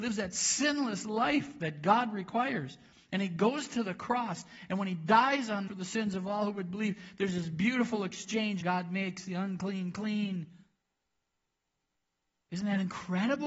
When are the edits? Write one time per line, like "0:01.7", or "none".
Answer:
0:05.7
0:08.6